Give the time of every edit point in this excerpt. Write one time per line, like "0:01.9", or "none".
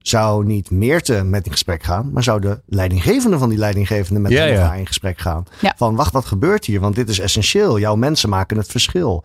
0:01.5
0:06.1